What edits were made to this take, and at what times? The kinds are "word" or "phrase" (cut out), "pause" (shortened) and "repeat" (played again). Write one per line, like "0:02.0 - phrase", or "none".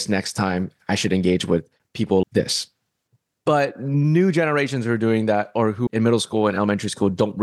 0:02.2 - word
0:05.9 - word

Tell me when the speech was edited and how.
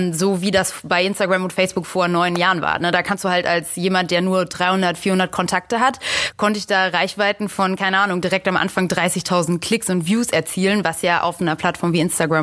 none

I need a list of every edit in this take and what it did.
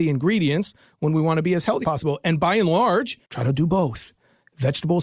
0:01.8 - word
0:03.2 - pause

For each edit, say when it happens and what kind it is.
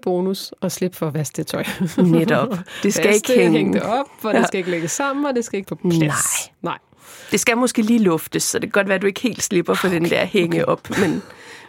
0:05.6 - word

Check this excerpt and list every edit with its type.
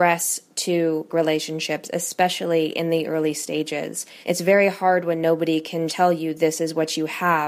0:01.1 - word
0:04.2 - pause
0:05.9 - word

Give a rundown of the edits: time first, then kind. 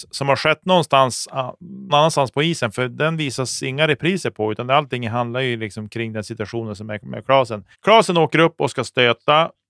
0:01.9 - word
0:07.7 - pause

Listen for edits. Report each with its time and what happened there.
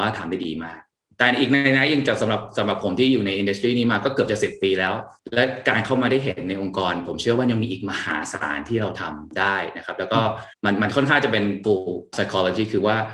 0:10.5 - pause
0:11.6 - phrase

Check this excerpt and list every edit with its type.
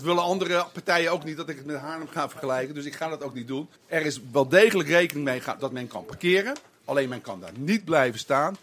0:03.8 - pause

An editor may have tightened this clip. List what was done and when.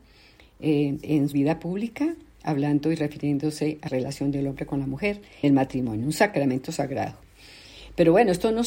0:01.3 - word
0:03.9 - word
0:05.4 - word

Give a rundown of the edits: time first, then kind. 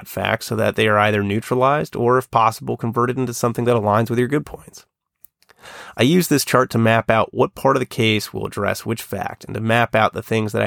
none

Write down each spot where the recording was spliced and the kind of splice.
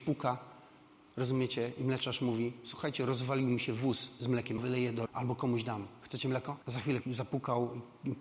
0:04.6 - word
0:05.1 - word
0:06.6 - pause
0:07.0 - word

